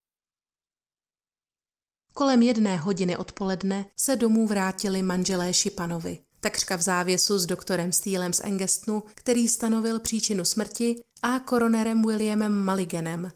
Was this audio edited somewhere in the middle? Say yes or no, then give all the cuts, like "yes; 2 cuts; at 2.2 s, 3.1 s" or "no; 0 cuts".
yes; 4 cuts; at 3.9 s, 6.3 s, 9.1 s, 11.1 s